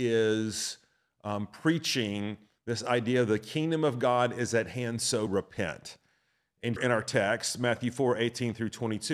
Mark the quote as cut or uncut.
cut